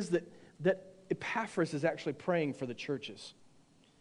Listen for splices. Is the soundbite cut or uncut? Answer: uncut